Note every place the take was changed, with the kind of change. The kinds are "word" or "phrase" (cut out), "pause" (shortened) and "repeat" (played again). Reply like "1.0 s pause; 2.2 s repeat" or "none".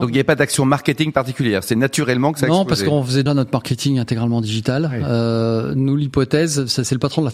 3.3 s word